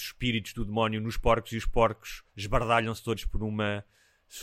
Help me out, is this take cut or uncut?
cut